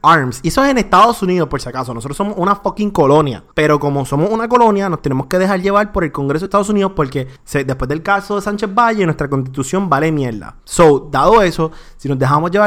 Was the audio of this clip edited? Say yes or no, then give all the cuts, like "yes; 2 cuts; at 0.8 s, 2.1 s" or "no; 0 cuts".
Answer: yes; 3 cuts; at 3.5 s, 7.4 s, 10.6 s